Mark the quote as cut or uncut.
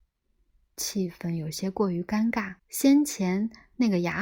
cut